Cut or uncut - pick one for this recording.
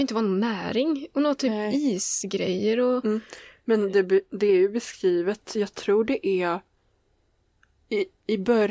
uncut